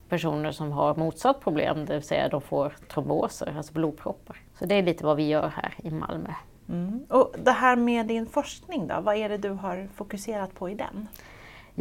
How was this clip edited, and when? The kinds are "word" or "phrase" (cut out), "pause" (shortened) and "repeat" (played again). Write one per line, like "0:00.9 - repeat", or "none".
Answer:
0:04.5 - pause